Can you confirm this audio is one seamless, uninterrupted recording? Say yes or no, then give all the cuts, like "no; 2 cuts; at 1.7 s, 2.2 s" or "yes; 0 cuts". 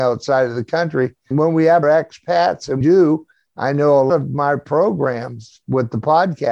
no; 4 cuts; at 1.3 s, 1.8 s, 2.8 s, 4.1 s